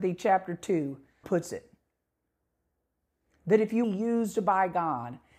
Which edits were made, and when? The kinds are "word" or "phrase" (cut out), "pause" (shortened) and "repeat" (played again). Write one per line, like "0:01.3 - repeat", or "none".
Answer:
0:01.2 - word
0:03.8 - phrase